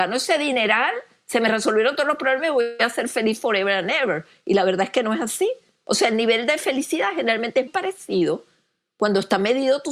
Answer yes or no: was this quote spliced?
yes